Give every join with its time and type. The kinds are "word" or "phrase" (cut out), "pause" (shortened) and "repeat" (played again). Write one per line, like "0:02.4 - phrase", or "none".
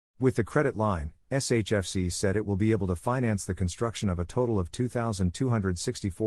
none